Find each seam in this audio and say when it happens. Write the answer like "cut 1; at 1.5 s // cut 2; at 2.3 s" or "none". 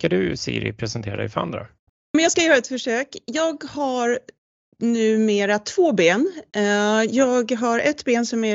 none